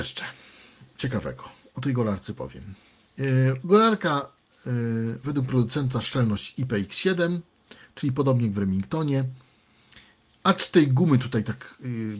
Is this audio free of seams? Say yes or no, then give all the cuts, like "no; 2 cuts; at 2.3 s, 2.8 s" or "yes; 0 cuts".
yes; 0 cuts